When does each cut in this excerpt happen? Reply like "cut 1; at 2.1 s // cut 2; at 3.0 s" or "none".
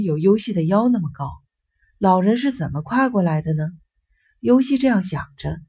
none